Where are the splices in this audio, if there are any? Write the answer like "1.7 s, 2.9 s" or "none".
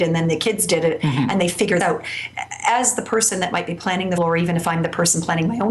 1.8 s, 4.2 s